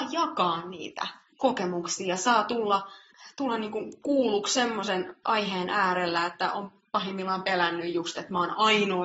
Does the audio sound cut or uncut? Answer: uncut